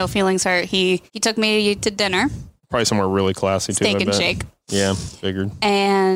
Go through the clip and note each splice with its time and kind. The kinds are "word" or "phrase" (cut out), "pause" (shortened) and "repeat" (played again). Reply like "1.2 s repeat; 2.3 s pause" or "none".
1.1 s pause; 2.6 s pause